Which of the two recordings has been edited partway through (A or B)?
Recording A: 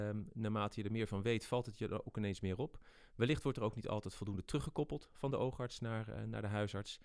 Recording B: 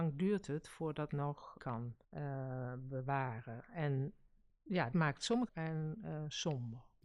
B